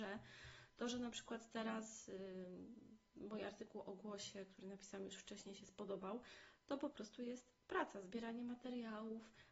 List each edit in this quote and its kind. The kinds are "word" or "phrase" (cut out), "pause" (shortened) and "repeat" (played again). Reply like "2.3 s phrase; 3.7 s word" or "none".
none